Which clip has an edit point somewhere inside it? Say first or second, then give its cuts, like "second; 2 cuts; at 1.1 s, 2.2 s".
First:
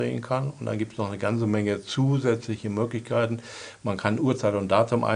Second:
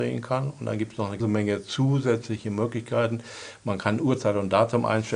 second; 1 cut; at 1.2 s